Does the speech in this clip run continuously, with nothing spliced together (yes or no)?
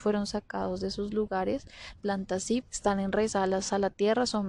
no